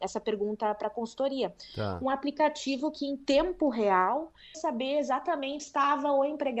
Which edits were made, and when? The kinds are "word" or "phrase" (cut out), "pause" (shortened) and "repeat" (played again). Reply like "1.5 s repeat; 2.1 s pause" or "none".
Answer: 4.5 s word; 5.6 s word

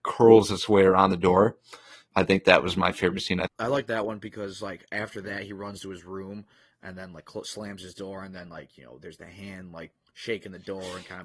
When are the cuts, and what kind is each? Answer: none

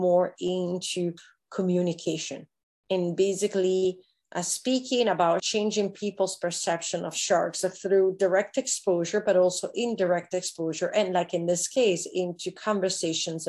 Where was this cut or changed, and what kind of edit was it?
5.4 s phrase

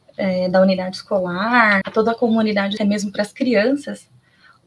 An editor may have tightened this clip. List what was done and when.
1.8 s word; 2.8 s phrase

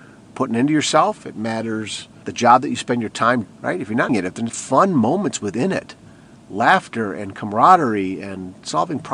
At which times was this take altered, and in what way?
2.2 s word; 3.4 s word; 4.1 s word; 4.5 s word

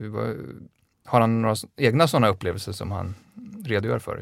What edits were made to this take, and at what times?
none

